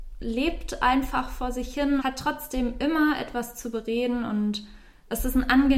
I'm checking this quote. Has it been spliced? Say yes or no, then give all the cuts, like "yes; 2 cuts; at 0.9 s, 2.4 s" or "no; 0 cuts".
yes; 1 cut; at 2.0 s